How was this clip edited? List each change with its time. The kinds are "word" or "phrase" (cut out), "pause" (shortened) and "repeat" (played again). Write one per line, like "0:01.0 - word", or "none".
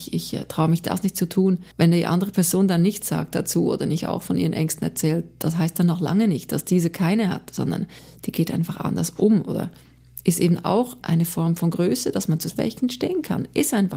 0:01.7 - pause
0:11.0 - word
0:12.5 - word